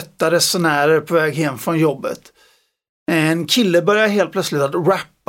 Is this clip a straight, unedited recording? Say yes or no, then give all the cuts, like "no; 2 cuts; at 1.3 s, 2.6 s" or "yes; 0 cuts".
yes; 0 cuts